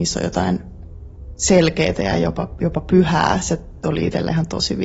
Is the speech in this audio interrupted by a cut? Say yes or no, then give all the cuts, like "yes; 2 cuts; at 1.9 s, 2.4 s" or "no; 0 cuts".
no; 0 cuts